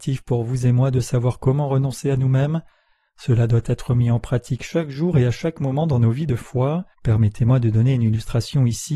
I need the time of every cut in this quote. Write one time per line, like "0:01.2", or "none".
0:06.9